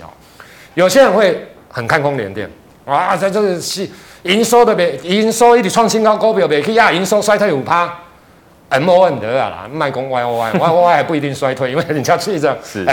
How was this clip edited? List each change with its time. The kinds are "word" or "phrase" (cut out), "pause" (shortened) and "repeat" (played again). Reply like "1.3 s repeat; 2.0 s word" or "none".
none